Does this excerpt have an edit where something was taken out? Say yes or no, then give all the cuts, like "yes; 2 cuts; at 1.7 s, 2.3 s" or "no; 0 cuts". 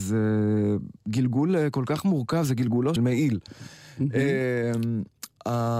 yes; 1 cut; at 3.0 s